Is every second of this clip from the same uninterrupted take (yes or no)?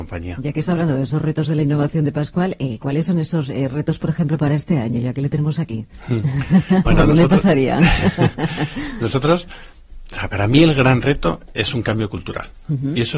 yes